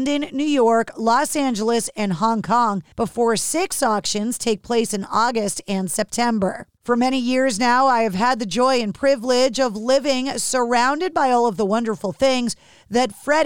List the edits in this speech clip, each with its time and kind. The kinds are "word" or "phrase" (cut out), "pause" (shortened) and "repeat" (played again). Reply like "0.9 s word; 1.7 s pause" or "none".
2.9 s pause; 6.8 s pause